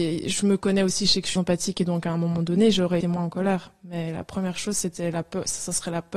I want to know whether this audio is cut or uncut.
cut